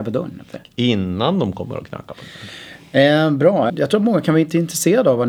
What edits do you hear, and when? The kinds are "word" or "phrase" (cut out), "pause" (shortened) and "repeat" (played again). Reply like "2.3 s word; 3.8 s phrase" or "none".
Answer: 3.7 s word